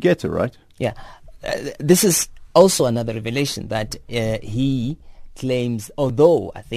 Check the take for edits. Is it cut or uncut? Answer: uncut